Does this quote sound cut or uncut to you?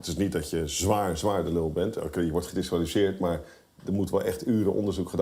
uncut